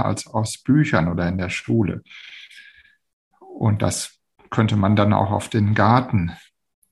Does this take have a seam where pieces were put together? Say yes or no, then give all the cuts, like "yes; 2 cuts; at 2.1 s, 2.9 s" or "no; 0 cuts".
no; 0 cuts